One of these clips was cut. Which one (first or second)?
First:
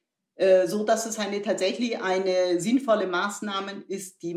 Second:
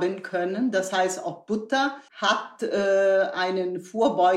second